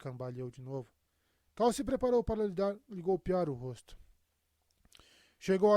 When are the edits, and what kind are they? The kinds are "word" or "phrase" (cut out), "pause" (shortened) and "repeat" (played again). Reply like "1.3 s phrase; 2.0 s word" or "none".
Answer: none